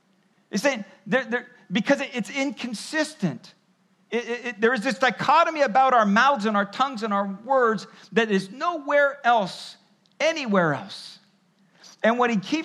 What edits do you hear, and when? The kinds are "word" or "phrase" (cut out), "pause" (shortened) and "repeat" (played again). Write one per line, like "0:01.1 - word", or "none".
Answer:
none